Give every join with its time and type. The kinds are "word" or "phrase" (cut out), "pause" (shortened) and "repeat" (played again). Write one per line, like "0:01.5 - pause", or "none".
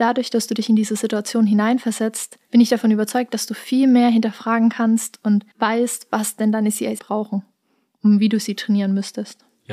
0:05.5 - pause
0:07.0 - word